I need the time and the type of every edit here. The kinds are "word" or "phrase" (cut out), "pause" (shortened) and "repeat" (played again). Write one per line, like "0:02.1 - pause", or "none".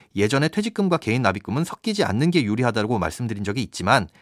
none